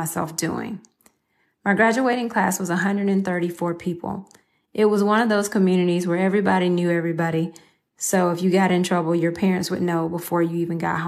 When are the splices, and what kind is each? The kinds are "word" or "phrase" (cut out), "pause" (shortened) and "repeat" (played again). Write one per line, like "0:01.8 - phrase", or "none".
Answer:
none

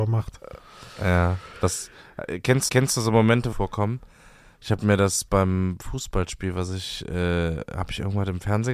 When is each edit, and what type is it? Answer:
0:02.7 - repeat
0:03.5 - phrase
0:05.8 - word

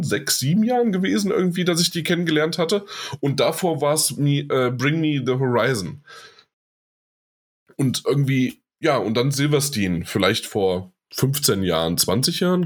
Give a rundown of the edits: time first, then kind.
none

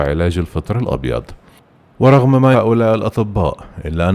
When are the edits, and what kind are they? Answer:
0:02.5 - word

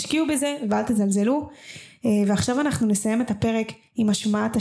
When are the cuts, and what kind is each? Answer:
none

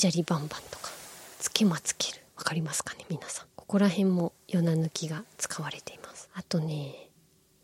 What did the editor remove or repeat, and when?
0:01.3 - pause
0:02.3 - pause
0:03.5 - pause
0:06.3 - pause

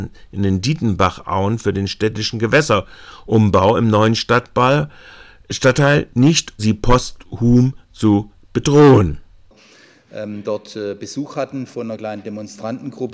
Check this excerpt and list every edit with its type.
0:06.6 - word

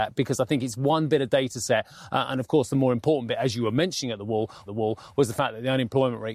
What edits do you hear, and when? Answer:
0:04.7 - repeat

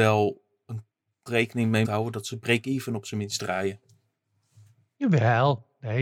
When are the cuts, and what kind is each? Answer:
0:01.3 - word
0:01.8 - word

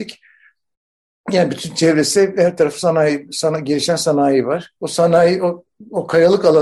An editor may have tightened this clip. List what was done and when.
0:04.8 - pause

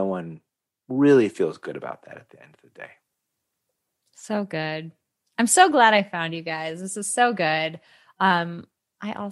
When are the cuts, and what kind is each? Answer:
none

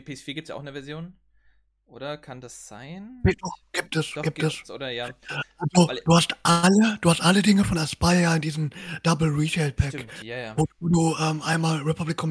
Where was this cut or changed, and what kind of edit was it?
0:10.7 - word

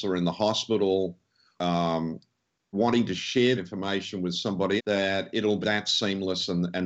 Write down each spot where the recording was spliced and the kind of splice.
0:01.6 - word
0:02.7 - word
0:03.6 - word
0:04.8 - word
0:05.6 - word

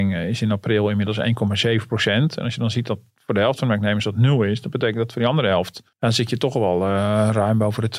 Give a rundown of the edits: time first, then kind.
0:05.9 - pause

